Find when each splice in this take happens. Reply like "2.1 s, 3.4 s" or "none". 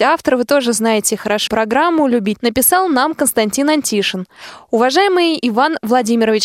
1.5 s, 2.4 s